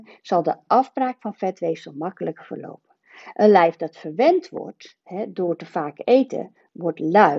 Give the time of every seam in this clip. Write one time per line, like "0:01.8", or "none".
0:05.0